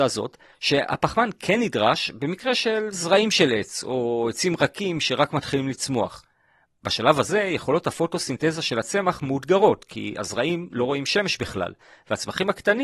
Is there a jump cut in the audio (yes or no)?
no